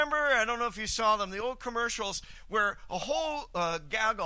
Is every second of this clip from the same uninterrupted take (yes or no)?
yes